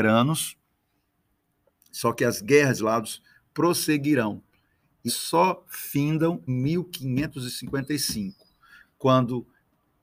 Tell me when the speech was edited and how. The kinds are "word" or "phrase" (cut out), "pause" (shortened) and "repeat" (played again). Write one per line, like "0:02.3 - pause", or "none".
0:02.8 - phrase
0:05.1 - word
0:06.5 - word